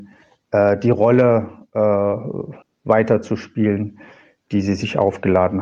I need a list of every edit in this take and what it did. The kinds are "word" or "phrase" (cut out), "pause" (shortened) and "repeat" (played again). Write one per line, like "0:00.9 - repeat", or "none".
0:02.6 - pause